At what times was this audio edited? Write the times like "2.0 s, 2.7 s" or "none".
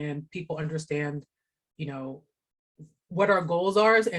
none